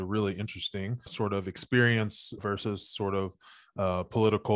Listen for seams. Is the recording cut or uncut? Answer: cut